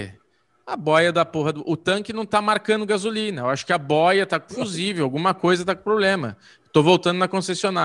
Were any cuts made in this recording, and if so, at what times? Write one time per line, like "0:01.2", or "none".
0:04.5